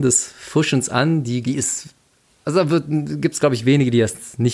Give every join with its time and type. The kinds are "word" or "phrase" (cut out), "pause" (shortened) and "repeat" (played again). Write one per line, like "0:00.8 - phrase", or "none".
0:01.4 - phrase